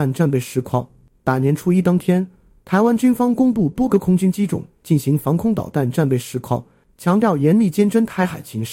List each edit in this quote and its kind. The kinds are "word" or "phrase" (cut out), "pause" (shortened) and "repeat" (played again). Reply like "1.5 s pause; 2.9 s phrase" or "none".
none